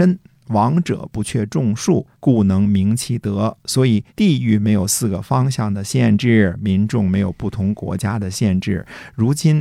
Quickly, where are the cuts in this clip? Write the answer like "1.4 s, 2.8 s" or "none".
2.1 s, 4.1 s